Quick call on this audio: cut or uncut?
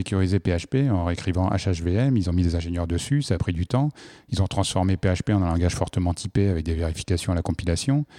uncut